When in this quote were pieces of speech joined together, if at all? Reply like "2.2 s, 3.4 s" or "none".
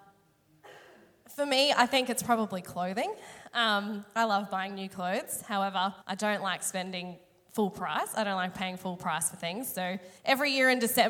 6.0 s, 10.2 s